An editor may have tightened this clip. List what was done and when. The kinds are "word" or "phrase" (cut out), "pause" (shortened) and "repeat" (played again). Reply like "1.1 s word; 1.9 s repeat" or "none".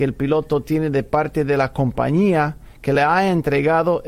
none